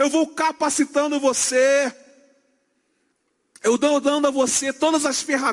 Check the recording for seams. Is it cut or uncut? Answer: uncut